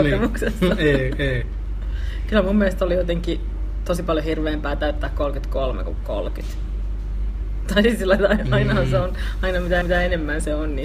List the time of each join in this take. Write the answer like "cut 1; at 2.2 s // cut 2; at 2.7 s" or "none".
cut 1; at 9.8 s